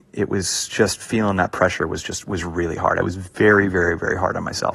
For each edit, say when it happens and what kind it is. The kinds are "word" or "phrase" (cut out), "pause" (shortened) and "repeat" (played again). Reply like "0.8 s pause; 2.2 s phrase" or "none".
none

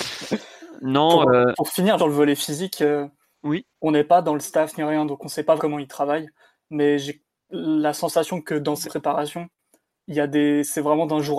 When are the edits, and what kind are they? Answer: 2.0 s word; 5.6 s word; 8.8 s word

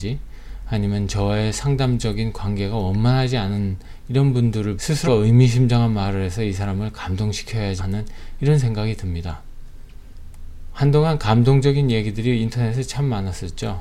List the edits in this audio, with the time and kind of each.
4.8 s word; 5.1 s word; 7.8 s word

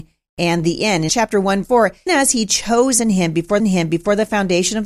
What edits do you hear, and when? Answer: 1.1 s word; 1.6 s word; 2.1 s word; 3.0 s word; 3.6 s repeat

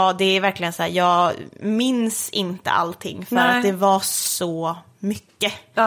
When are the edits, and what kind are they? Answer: none

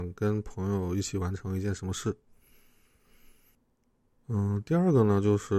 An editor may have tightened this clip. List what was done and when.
none

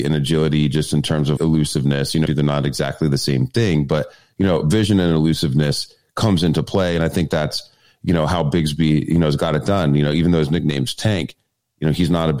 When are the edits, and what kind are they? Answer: 1.4 s word; 2.3 s word

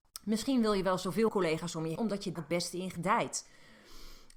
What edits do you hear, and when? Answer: 1.3 s word; 2.0 s word; 2.4 s word

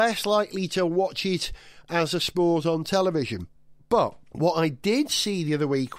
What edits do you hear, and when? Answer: none

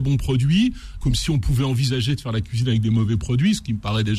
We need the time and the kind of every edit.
1.0 s word

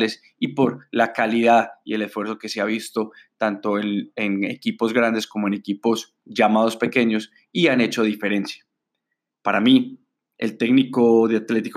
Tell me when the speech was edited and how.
none

